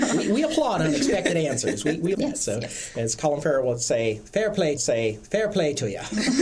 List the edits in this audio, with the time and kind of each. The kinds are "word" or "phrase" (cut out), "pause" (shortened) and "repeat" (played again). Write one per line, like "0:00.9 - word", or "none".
0:02.1 - word
0:04.8 - repeat